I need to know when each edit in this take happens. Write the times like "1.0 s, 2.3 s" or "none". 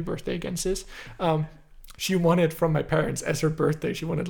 2.0 s